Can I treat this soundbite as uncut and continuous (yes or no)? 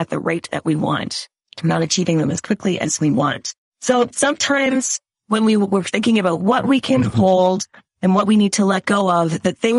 yes